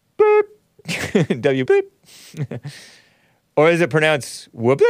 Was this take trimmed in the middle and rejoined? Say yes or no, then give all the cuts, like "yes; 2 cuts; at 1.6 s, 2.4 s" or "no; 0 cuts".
yes; 1 cut; at 1.7 s